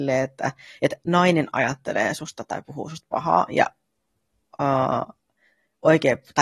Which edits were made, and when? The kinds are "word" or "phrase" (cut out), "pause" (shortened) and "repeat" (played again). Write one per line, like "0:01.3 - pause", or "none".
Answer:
none